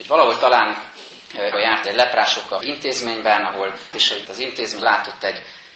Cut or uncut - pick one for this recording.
cut